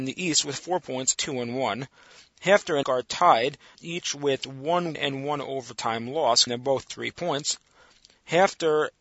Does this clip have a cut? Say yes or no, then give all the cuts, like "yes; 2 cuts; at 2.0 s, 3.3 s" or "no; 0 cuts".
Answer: yes; 5 cuts; at 1.2 s, 2.8 s, 3.7 s, 4.9 s, 6.5 s